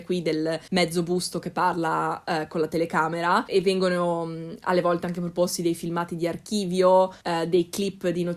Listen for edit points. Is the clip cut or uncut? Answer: cut